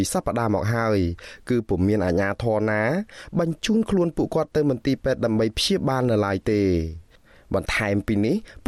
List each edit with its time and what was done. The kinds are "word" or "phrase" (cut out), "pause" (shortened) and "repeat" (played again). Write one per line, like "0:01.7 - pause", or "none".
none